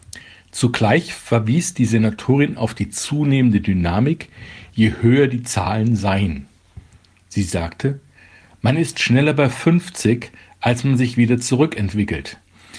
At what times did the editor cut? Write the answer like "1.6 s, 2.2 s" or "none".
none